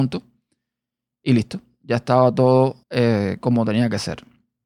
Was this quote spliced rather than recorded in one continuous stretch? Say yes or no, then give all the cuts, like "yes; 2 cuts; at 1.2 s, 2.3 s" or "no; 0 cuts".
yes; 1 cut; at 2.8 s